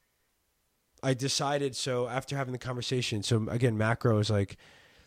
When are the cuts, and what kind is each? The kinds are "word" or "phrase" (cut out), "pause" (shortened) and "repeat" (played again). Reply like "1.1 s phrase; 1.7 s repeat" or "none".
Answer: none